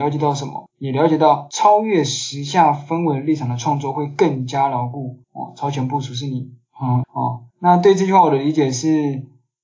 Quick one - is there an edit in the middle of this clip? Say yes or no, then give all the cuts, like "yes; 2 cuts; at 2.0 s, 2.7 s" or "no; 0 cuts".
yes; 3 cuts; at 5.2 s, 7.0 s, 7.5 s